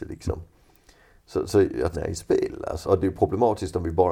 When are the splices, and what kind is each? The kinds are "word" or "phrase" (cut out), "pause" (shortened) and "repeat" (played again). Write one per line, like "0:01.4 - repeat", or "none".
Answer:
0:01.9 - phrase
0:02.8 - word